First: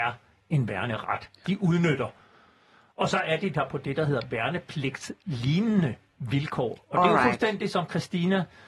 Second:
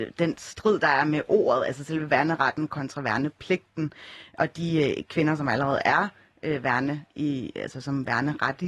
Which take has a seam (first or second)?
second